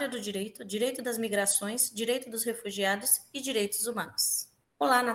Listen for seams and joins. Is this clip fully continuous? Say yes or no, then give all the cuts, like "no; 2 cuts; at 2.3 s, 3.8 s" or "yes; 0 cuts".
yes; 0 cuts